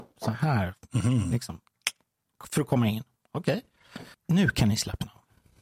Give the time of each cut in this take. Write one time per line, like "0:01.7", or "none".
0:04.1